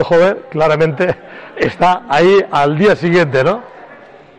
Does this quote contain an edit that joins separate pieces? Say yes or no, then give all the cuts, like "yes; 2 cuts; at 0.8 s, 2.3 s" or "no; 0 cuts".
no; 0 cuts